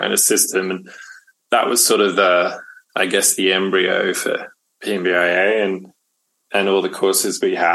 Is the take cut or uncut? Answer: uncut